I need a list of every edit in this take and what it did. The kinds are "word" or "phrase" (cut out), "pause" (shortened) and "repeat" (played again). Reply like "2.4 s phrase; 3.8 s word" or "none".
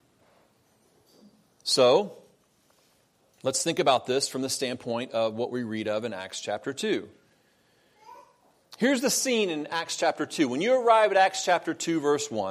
none